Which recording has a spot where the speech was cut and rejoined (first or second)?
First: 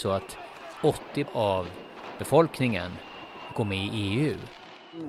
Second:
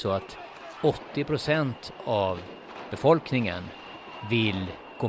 first